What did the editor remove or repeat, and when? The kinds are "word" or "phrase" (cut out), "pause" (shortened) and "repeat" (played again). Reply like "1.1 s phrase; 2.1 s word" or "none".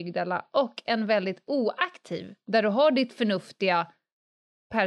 2.4 s word